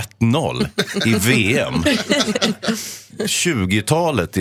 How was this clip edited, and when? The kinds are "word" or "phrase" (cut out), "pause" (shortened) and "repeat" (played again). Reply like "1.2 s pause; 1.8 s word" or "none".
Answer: 3.1 s phrase